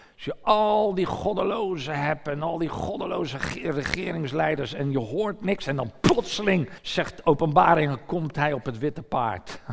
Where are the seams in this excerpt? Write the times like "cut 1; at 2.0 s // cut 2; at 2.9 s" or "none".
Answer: cut 1; at 6.8 s